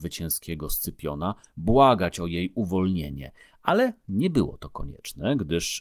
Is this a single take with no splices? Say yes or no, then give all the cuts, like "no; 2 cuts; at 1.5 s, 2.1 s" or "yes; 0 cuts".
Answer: yes; 0 cuts